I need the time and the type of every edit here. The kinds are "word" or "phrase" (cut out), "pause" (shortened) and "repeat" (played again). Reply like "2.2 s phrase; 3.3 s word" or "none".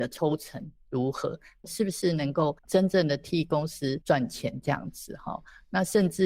2.6 s pause